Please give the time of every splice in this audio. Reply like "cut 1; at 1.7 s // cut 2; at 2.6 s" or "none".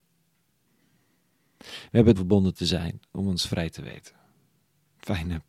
cut 1; at 2.2 s